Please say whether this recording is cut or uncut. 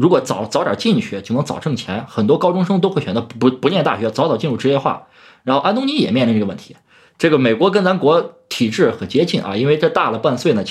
uncut